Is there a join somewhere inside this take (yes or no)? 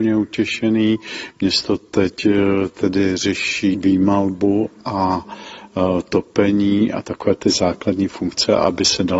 no